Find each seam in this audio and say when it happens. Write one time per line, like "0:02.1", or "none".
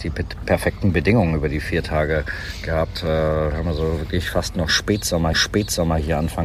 0:05.3